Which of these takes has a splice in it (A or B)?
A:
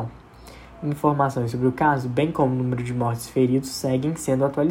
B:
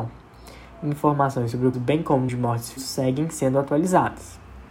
B